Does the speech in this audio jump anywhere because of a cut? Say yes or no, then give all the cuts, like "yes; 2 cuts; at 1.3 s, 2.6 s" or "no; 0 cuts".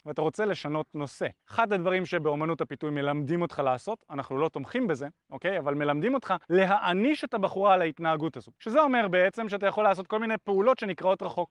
yes; 3 cuts; at 1.4 s, 6.4 s, 8.6 s